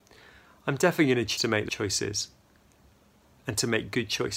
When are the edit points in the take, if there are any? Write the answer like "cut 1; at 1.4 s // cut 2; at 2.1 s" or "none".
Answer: cut 1; at 1.4 s // cut 2; at 1.7 s

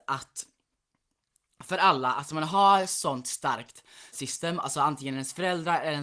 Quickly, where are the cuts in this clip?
cut 1; at 4.1 s // cut 2; at 4.6 s

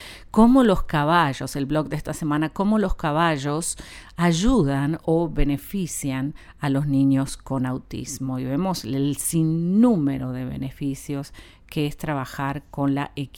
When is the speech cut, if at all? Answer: none

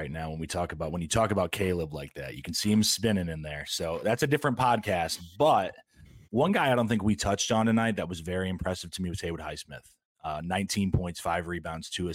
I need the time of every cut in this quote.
cut 1; at 6.2 s

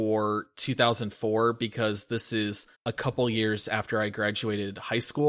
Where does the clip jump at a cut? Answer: cut 1; at 2.8 s

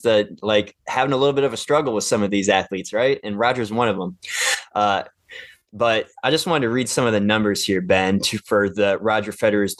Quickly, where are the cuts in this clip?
none

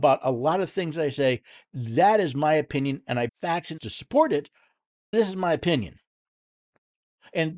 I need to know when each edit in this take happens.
cut 1; at 3.3 s // cut 2; at 3.8 s // cut 3; at 5.1 s

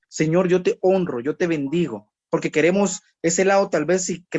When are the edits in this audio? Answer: cut 1; at 2.2 s

